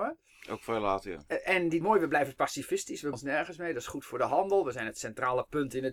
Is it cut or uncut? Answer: cut